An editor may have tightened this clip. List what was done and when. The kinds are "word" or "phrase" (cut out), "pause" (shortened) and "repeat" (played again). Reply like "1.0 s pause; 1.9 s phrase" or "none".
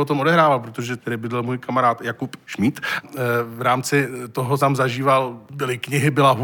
1.0 s word; 3.0 s word; 4.6 s phrase